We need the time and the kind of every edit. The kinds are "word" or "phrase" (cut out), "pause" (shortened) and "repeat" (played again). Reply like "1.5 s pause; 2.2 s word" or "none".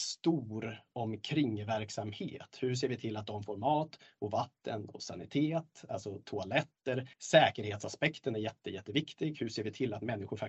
7.1 s pause